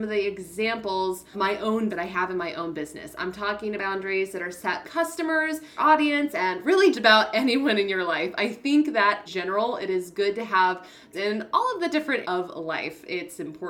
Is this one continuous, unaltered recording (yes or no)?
no